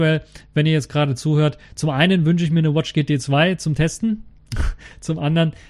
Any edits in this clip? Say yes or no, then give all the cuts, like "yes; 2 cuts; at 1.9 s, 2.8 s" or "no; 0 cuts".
no; 0 cuts